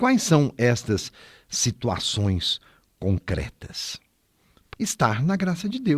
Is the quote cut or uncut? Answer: cut